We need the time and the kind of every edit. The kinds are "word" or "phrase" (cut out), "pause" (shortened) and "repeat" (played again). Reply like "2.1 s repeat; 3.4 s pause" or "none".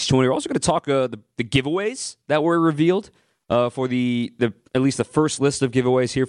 none